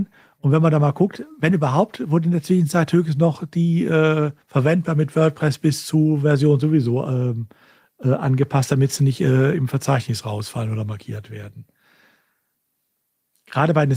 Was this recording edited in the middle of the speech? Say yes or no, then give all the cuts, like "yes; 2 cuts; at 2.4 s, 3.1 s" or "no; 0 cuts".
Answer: yes; 1 cut; at 4.4 s